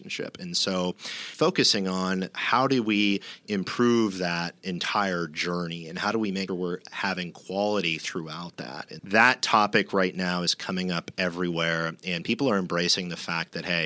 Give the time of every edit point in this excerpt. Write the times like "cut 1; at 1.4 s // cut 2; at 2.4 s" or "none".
cut 1; at 6.5 s // cut 2; at 9.0 s